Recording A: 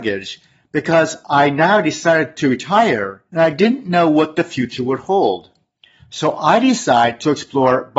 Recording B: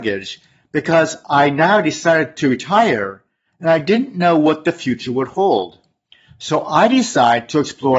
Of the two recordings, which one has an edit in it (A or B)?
A